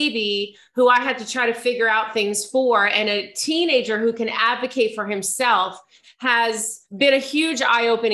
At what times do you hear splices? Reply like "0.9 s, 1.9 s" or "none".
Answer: 6.9 s